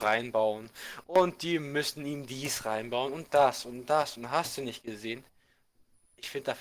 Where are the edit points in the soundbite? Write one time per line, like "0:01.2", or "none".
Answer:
none